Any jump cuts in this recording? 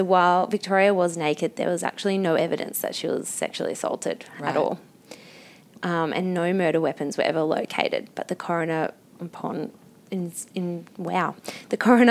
no; 0 cuts

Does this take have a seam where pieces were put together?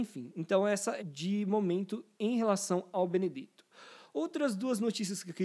yes; 1 cut; at 1.0 s

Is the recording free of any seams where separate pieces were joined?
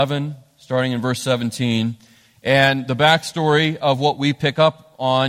yes; 0 cuts

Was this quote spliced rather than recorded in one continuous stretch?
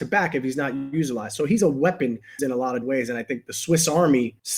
yes; 2 cuts; at 2.4 s, 2.8 s

